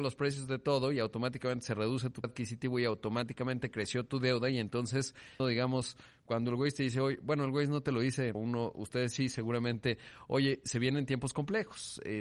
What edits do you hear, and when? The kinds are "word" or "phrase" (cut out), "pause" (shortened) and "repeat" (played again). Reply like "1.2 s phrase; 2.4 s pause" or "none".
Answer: 2.2 s word; 5.4 s phrase; 8.3 s word